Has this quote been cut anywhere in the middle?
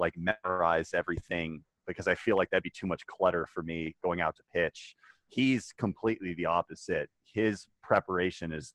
no; 0 cuts

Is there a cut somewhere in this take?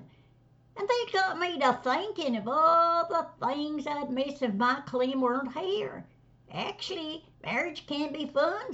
yes; 1 cut; at 7.3 s

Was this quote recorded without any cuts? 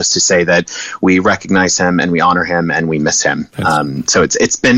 yes; 0 cuts

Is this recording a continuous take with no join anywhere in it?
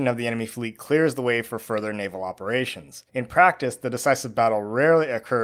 no; 1 cut; at 3.1 s

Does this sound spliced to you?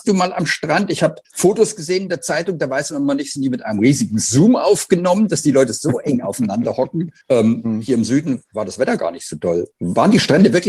yes; 3 cuts; at 1.2 s, 7.2 s, 9.7 s

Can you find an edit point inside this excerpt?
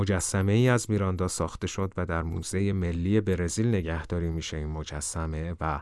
no; 0 cuts

